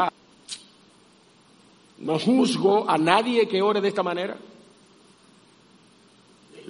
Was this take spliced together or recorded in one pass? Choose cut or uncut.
uncut